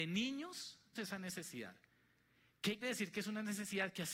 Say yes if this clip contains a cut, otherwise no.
yes